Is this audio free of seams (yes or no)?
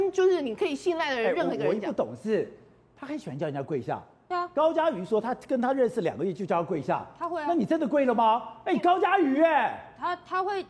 yes